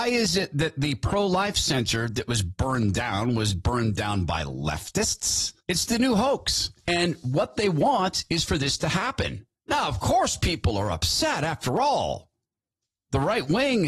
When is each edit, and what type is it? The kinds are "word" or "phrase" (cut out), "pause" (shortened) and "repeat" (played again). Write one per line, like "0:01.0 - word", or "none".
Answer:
0:05.6 - pause
0:06.8 - pause
0:09.6 - pause